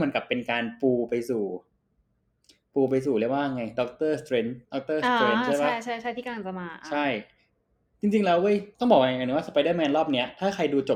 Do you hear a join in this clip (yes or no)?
yes